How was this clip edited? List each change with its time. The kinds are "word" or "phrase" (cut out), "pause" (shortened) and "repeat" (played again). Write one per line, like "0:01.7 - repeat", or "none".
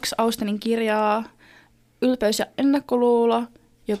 none